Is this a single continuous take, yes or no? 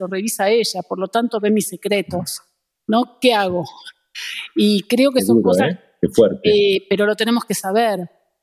yes